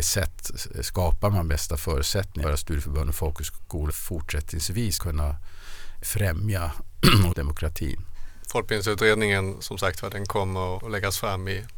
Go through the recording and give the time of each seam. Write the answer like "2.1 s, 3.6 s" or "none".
2.4 s, 3.9 s, 5.0 s, 6.0 s, 7.3 s, 10.8 s

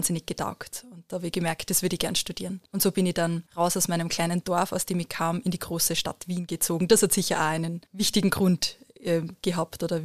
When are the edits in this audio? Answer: 2.7 s, 3.5 s, 7.9 s

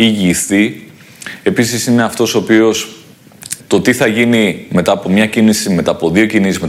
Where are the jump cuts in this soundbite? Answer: 3.6 s

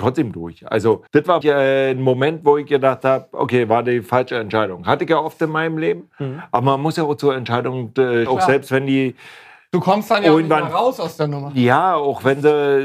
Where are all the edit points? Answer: 1.1 s, 1.4 s, 8.3 s

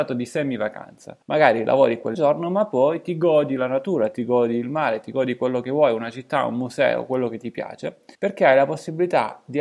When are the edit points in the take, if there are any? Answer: 1.2 s, 2.1 s, 8.1 s

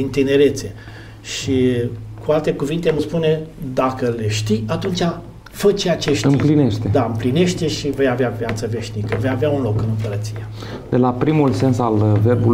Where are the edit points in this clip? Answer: 3.0 s

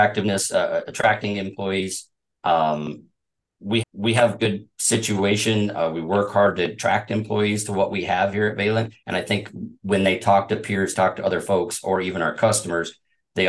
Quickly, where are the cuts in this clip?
3.8 s, 4.4 s, 9.0 s, 9.8 s

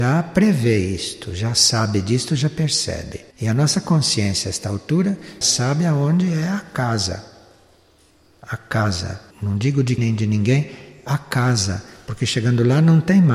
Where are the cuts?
3.3 s, 5.4 s, 9.3 s, 10.0 s

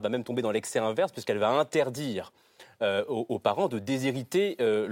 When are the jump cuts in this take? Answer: none

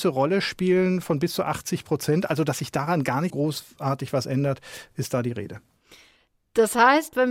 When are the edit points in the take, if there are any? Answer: 3.3 s

